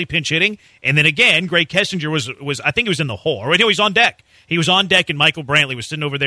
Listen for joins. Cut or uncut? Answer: uncut